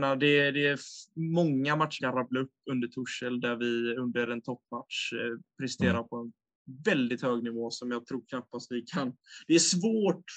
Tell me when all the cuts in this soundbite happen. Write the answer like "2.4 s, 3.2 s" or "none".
2.0 s